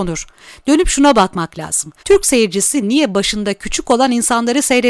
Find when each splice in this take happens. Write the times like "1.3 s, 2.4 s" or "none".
2.0 s